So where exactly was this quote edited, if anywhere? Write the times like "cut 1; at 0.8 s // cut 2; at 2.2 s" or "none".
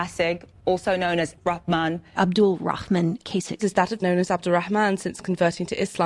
cut 1; at 1.4 s // cut 2; at 3.2 s // cut 3; at 4.0 s